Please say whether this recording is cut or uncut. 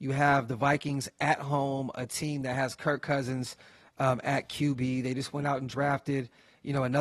uncut